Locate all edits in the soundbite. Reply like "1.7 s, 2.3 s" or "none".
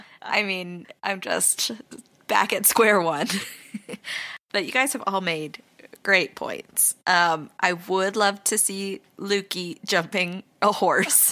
none